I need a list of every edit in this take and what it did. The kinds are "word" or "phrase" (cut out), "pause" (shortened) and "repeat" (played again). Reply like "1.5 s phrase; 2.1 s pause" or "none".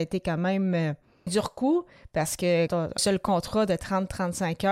1.3 s word; 2.7 s word; 3.0 s word